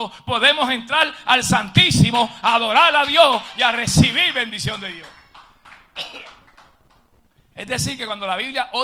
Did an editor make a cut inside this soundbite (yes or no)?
no